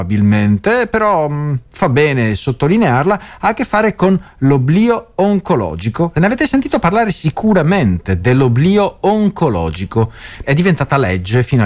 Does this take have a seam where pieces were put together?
yes; 1 cut; at 10.4 s

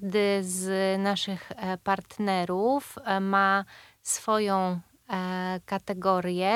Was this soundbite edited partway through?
no; 0 cuts

